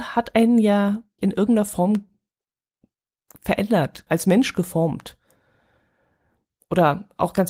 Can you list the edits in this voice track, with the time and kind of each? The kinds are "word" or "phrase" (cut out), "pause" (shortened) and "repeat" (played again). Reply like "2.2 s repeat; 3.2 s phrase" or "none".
1.2 s word; 4.1 s word